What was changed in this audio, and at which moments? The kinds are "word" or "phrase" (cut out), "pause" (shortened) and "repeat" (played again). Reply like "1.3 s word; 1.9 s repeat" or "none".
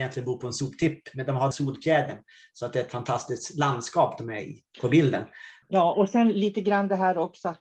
1.5 s phrase; 4.7 s pause; 5.6 s pause